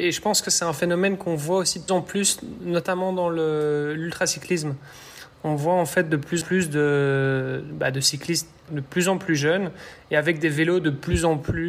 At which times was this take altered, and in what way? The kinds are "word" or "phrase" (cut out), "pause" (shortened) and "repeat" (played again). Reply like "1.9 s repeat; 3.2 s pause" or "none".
1.9 s word; 6.4 s word; 8.7 s word